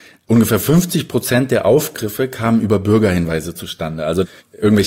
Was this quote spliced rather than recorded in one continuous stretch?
no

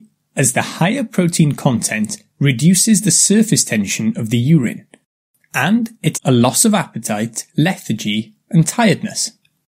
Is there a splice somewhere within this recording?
yes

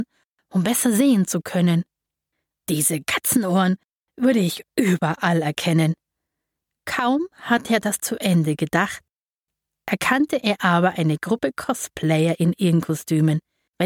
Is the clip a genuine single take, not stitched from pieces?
yes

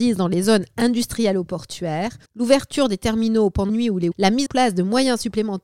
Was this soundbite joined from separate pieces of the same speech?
yes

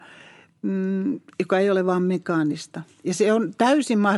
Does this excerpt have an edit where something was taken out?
no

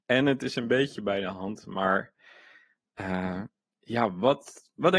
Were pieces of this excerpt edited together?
no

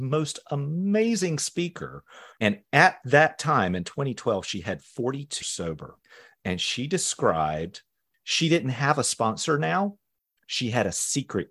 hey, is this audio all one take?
no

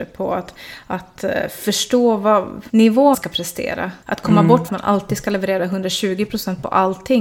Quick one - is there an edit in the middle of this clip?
yes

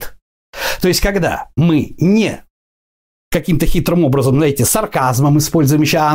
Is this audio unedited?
yes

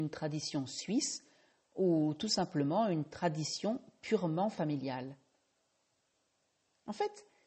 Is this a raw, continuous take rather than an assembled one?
yes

